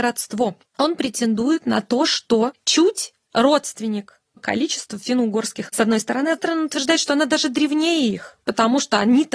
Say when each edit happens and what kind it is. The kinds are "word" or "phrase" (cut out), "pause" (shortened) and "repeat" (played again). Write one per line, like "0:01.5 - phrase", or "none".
0:04.4 - word
0:05.7 - word
0:06.4 - word